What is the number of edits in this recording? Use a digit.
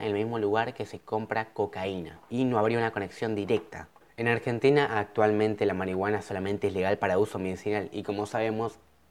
0